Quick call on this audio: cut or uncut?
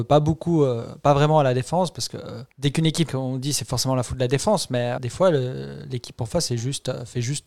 cut